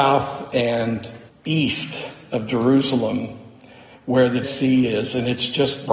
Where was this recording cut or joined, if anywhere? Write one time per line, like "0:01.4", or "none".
0:01.3
0:04.4